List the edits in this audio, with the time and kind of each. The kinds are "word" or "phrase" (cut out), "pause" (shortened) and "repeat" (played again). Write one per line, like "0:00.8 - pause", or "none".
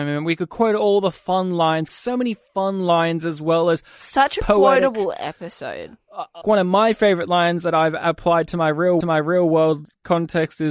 0:01.9 - phrase
0:06.4 - word
0:09.0 - repeat